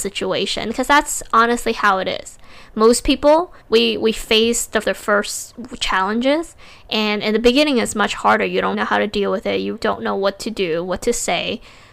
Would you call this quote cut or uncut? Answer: cut